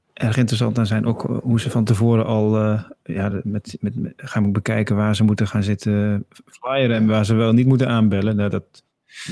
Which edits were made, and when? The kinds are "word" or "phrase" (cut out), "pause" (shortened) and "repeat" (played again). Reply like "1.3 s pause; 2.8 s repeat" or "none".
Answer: none